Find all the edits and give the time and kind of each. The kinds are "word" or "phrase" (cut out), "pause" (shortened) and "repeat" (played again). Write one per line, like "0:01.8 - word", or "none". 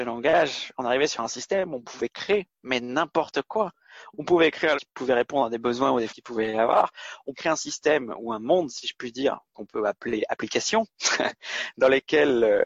0:04.8 - word
0:06.1 - word
0:07.3 - word